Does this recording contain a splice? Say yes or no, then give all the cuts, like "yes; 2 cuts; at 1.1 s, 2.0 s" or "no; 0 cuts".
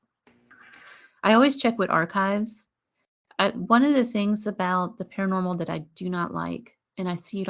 no; 0 cuts